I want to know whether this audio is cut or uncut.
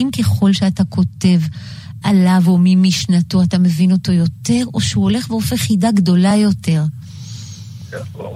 uncut